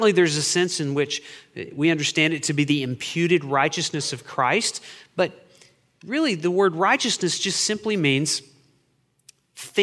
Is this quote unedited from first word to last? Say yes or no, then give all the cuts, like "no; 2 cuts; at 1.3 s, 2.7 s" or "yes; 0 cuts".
yes; 0 cuts